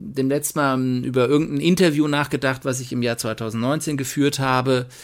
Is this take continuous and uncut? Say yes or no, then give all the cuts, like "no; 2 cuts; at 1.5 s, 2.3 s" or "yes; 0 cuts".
yes; 0 cuts